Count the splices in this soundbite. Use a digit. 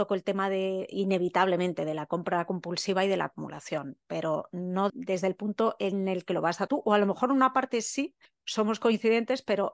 3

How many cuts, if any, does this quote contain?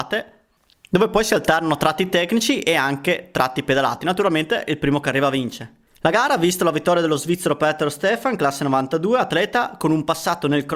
1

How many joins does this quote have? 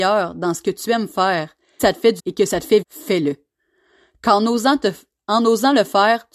3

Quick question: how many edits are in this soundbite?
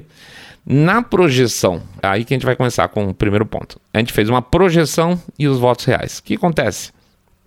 2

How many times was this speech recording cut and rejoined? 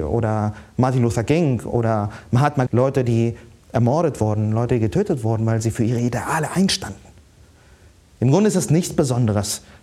1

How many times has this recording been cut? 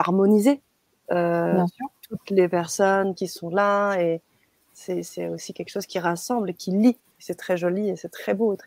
0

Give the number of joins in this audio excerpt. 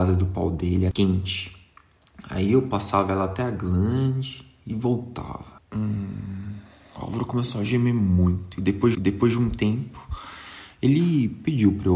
3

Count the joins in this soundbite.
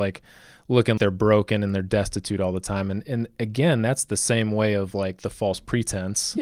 1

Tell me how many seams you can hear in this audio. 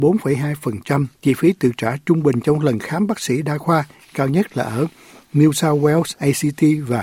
1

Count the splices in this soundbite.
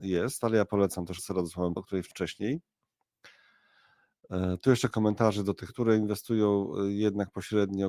5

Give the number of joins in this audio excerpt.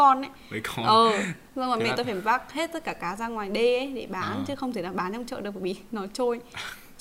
0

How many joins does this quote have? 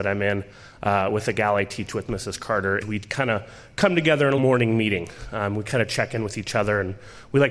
2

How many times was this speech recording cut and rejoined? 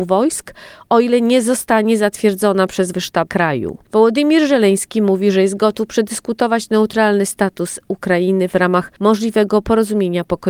3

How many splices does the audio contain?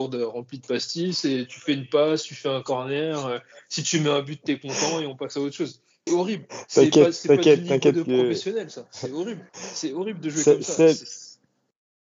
2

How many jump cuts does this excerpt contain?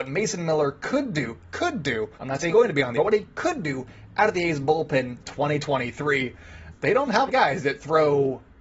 6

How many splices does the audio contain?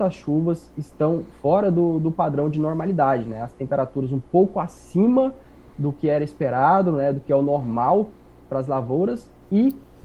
0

